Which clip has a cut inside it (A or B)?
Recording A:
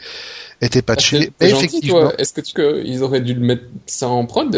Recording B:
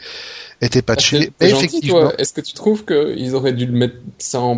A